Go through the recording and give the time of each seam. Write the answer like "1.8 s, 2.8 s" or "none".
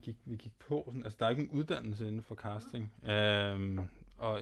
2.2 s